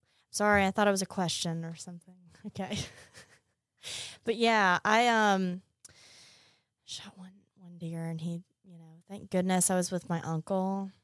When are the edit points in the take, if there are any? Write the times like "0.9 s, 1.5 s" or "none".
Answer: none